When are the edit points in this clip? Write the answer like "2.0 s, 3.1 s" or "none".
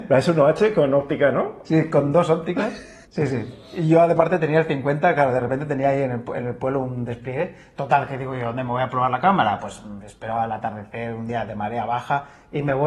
3.0 s